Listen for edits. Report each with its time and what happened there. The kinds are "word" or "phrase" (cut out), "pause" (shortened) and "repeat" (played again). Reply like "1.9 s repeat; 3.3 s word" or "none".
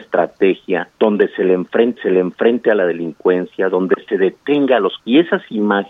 0.9 s pause; 2.0 s repeat; 5.0 s word